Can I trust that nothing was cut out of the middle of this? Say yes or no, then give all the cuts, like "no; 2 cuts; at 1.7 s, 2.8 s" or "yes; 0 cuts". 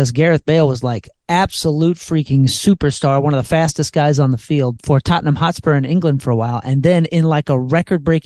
yes; 0 cuts